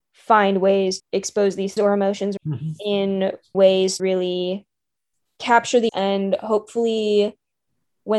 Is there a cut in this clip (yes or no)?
yes